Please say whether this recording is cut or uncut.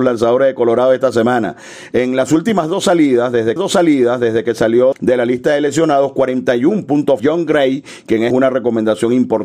cut